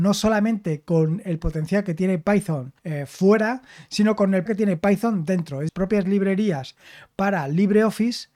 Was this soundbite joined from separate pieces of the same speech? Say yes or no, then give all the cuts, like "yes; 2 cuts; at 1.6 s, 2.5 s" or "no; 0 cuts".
yes; 3 cuts; at 2.8 s, 4.5 s, 5.7 s